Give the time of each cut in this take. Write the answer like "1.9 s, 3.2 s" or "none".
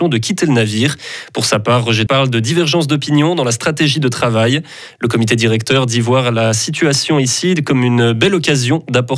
2.1 s